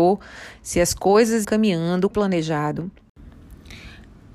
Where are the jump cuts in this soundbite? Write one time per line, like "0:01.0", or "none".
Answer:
0:01.4
0:02.1